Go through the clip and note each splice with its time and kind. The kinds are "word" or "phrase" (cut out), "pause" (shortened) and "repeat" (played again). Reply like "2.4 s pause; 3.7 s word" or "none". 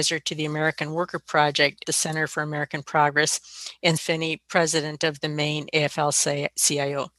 1.8 s word; 4.0 s word